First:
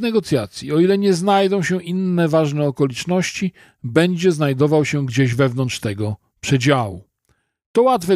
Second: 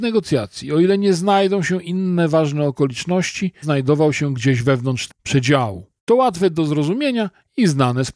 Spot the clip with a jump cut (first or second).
second